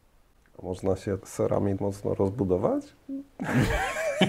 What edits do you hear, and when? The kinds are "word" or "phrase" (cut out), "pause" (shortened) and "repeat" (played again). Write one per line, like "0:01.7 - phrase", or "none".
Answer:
0:01.2 - word
0:01.8 - word